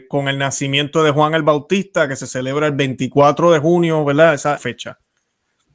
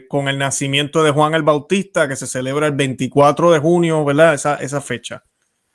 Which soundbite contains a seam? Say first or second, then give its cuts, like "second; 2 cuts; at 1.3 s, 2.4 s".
first; 1 cut; at 4.6 s